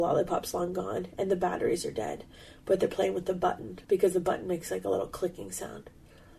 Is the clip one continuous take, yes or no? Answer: no